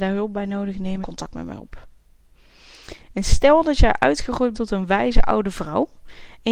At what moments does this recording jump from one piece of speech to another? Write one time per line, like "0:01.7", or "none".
0:01.0
0:04.5

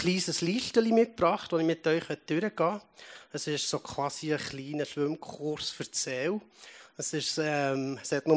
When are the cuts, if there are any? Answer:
none

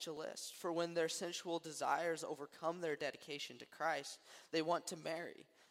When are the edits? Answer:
none

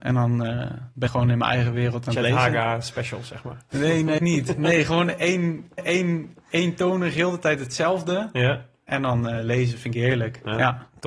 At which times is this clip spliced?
0:01.1
0:04.2
0:05.8

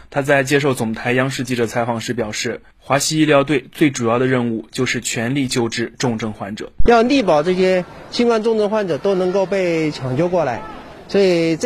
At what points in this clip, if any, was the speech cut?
none

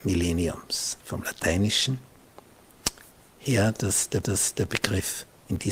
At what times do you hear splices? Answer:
0:01.0
0:04.2

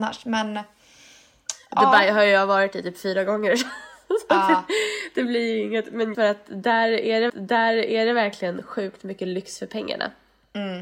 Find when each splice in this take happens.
0:06.1
0:07.3

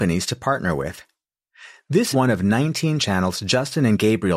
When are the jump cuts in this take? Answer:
0:02.1
0:03.0

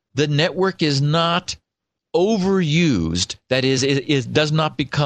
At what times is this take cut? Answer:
none

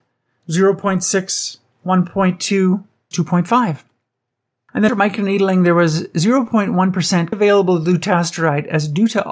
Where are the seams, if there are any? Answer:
0:03.1
0:04.9
0:07.3

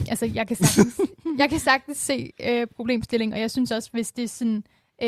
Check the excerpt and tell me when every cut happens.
none

